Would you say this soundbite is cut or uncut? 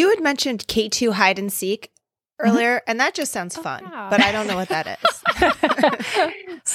uncut